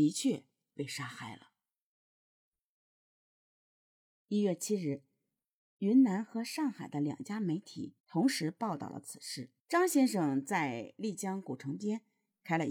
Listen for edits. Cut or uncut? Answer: cut